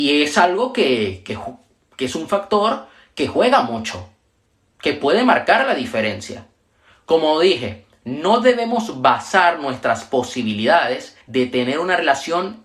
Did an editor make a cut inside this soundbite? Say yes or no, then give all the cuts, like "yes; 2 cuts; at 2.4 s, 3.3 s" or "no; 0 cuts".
yes; 1 cut; at 11.2 s